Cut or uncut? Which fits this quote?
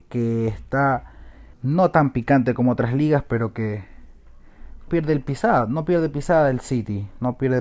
cut